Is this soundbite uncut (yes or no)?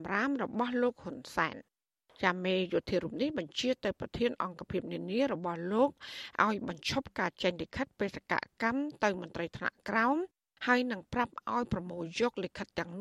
yes